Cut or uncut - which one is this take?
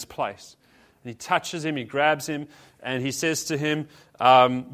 uncut